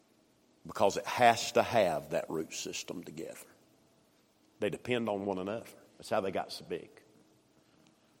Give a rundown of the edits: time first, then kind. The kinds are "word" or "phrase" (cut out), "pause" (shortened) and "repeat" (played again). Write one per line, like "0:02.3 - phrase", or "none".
none